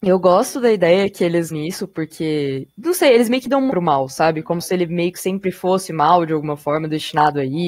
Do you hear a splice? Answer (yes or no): yes